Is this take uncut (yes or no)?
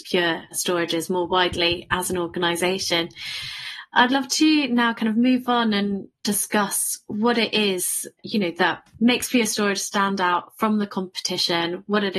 yes